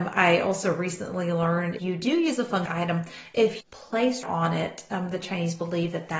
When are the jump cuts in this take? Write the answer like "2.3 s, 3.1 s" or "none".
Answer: 1.8 s, 2.7 s, 3.6 s, 4.2 s